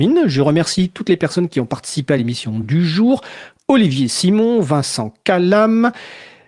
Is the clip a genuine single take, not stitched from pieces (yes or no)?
yes